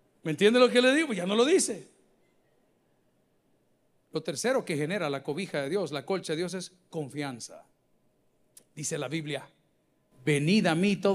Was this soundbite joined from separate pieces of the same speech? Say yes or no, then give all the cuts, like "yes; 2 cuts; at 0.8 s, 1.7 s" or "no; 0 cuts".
no; 0 cuts